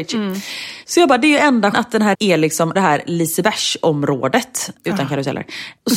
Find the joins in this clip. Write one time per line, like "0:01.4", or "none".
0:01.7
0:02.1
0:02.8